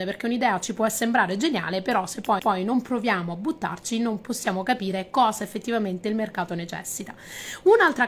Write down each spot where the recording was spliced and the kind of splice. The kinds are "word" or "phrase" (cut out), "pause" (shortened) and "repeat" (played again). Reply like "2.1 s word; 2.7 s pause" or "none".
2.4 s repeat

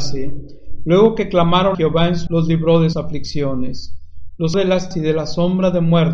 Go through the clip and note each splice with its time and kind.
1.7 s word; 2.3 s word; 2.9 s word; 4.5 s word; 4.9 s word

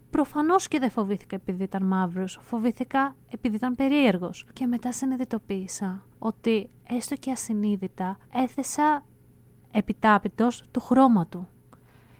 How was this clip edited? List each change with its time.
4.5 s pause; 6.1 s pause; 8.2 s pause

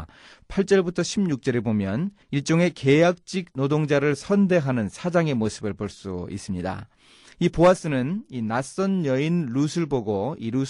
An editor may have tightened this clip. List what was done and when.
2.2 s pause

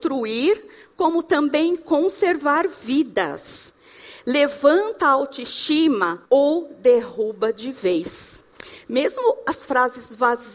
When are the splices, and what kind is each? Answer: 6.3 s pause

